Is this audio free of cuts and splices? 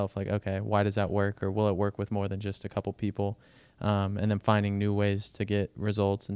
yes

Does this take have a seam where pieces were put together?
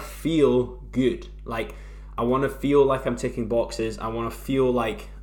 no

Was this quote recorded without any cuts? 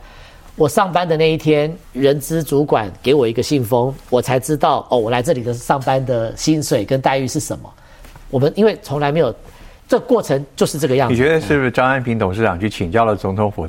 no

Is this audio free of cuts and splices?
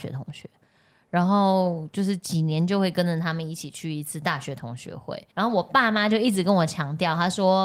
no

